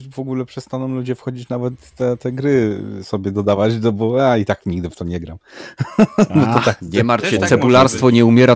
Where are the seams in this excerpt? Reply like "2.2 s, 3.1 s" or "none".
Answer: none